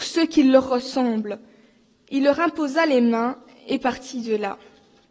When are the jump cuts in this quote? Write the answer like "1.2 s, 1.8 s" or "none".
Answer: none